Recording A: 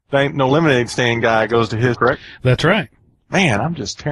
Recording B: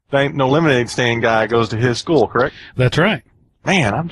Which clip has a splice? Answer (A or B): A